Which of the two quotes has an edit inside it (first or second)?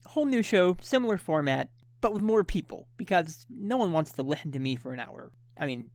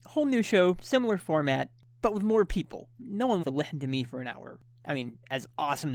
second